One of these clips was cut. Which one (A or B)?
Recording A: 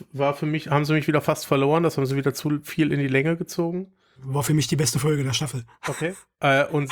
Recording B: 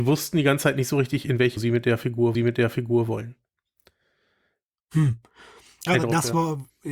B